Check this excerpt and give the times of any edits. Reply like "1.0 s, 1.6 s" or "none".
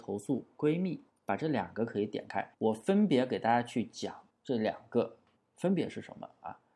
1.1 s, 2.5 s, 4.3 s, 5.4 s